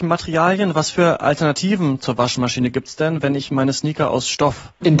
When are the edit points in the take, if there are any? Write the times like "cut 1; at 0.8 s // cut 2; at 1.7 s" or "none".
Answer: none